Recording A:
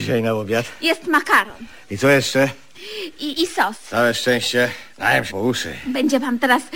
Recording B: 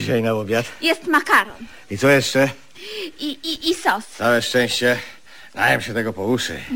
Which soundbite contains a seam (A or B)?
A